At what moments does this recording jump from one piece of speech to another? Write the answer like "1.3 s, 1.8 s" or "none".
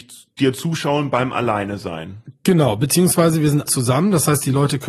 3.7 s